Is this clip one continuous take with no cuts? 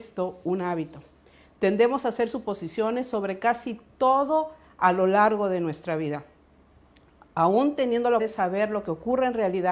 no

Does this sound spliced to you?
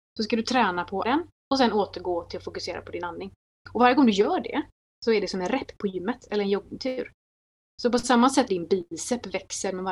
yes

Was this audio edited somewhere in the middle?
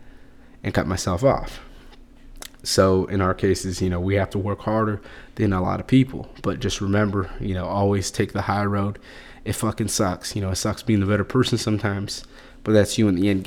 no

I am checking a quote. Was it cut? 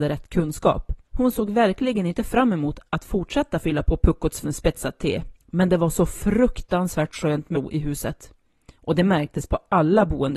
yes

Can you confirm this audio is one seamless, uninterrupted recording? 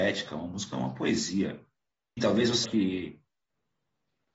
no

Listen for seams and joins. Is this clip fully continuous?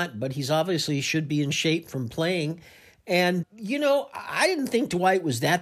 no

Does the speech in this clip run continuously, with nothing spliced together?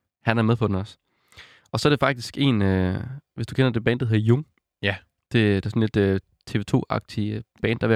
yes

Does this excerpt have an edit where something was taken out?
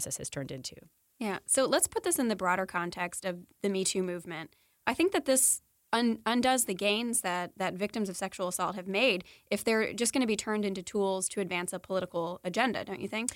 no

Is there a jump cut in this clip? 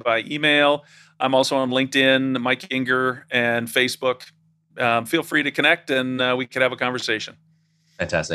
no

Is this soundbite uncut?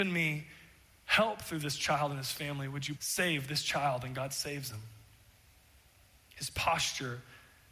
no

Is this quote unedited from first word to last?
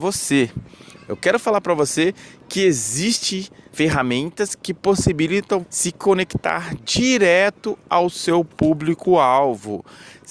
no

